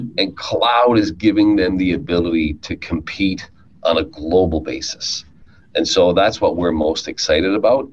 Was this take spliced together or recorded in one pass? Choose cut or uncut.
uncut